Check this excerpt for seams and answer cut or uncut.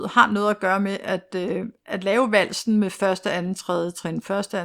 uncut